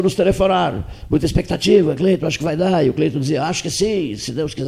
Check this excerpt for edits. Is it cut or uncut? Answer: uncut